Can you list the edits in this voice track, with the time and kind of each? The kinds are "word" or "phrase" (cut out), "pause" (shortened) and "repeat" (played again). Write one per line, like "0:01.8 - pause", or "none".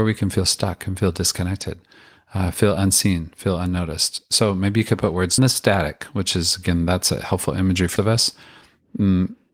0:05.4 - phrase
0:08.0 - word